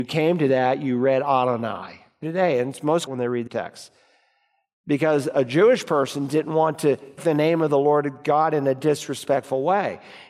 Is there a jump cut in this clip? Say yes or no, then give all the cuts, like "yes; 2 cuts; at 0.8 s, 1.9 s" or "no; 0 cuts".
yes; 4 cuts; at 2.2 s, 3.1 s, 3.5 s, 7.2 s